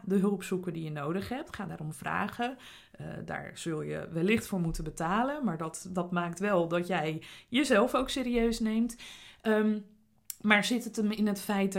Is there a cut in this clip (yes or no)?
no